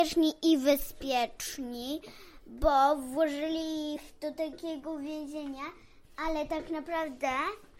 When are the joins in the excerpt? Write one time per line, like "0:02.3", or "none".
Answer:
none